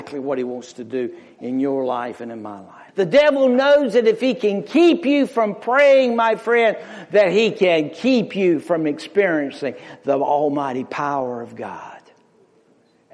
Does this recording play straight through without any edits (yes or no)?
no